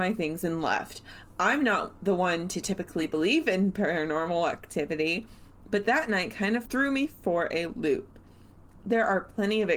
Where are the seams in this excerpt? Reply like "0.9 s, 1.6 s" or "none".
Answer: none